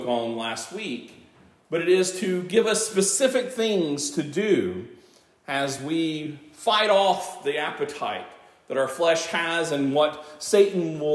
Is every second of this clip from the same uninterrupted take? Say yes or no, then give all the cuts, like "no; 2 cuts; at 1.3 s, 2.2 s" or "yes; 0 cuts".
yes; 0 cuts